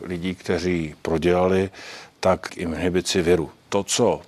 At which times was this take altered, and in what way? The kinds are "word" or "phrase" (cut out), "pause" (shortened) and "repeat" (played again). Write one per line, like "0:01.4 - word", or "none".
0:01.0 - word
0:02.5 - word